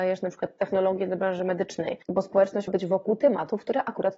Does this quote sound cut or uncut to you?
cut